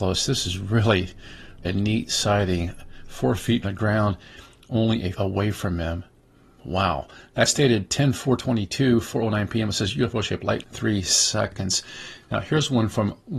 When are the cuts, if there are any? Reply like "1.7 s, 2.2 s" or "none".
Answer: 1.6 s, 3.6 s, 5.1 s, 10.6 s